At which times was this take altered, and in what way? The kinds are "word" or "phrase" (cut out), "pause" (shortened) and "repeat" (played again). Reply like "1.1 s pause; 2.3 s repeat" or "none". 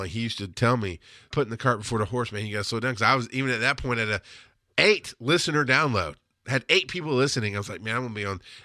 1.3 s word